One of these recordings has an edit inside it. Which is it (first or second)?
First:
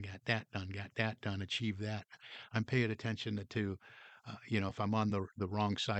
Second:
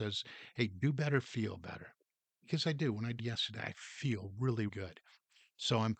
second